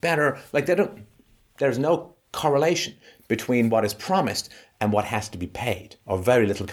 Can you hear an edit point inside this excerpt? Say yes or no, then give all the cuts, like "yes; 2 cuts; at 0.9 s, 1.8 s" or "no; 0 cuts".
no; 0 cuts